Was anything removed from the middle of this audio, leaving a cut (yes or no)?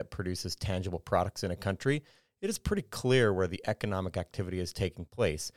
no